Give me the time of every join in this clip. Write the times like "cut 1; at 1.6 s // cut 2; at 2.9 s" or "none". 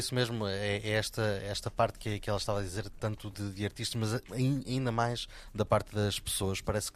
none